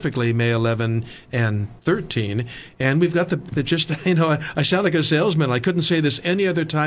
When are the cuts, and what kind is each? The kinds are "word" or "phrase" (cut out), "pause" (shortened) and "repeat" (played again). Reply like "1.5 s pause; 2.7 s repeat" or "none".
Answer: 1.8 s pause